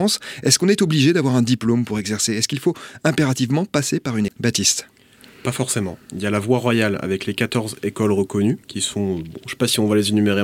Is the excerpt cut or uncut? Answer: cut